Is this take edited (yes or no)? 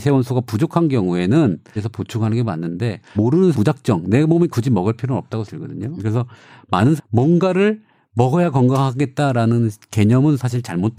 yes